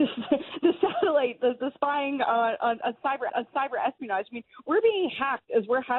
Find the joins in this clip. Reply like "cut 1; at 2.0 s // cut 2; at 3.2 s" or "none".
cut 1; at 3.3 s